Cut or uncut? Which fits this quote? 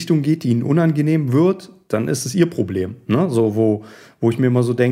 uncut